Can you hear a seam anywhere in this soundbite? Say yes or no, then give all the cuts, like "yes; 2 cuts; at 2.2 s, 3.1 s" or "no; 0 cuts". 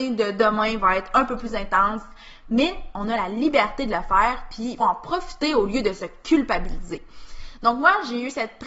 yes; 1 cut; at 4.8 s